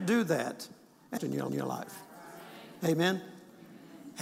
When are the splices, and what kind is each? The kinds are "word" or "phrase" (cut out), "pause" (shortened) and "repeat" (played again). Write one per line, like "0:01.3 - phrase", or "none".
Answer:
0:01.2 - phrase
0:01.5 - repeat